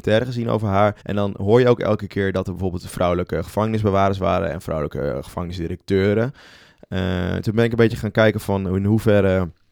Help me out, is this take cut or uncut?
cut